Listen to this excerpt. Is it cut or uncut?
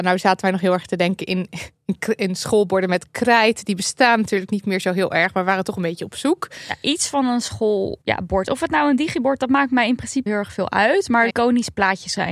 cut